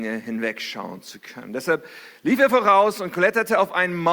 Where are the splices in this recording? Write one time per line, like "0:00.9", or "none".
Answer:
none